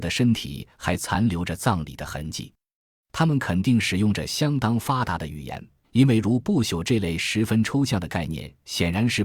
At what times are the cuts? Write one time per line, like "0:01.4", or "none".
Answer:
0:05.8